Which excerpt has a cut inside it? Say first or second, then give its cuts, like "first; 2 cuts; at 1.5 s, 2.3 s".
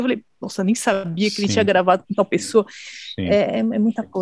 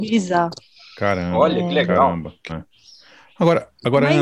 second; 1 cut; at 2.5 s